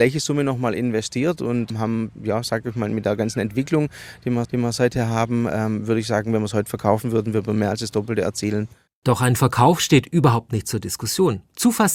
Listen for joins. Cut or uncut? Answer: cut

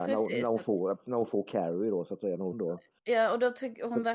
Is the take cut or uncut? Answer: cut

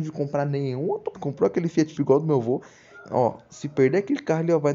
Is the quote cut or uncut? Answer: cut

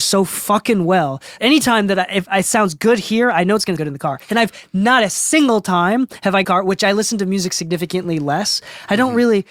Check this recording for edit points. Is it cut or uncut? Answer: cut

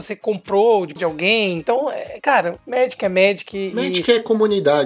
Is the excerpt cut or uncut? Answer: cut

